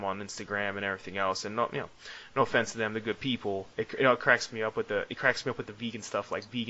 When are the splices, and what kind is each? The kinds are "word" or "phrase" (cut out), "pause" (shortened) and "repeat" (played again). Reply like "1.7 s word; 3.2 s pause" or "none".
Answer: 3.7 s pause

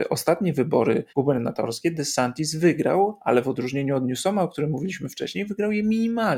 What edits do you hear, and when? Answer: 1.1 s pause

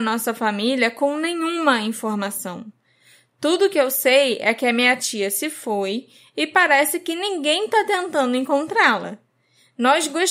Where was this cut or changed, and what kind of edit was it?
none

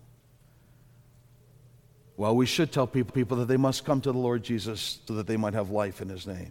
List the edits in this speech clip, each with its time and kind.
3.1 s repeat; 5.1 s word

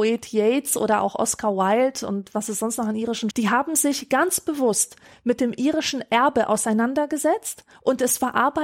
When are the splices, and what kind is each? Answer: 3.3 s phrase

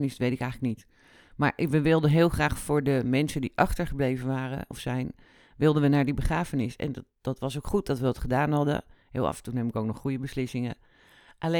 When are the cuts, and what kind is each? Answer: none

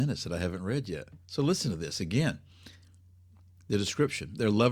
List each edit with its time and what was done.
1.2 s pause

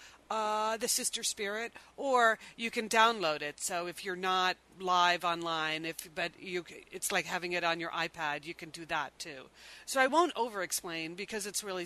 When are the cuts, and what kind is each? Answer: none

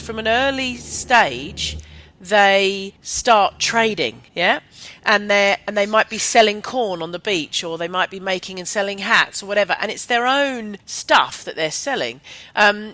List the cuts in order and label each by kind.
3.0 s pause; 4.3 s pause; 10.8 s pause

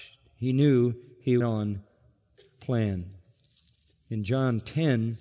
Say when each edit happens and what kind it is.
1.4 s phrase

